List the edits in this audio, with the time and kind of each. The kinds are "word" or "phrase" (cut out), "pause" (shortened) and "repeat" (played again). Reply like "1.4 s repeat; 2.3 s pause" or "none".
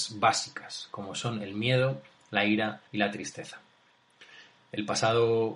2.9 s pause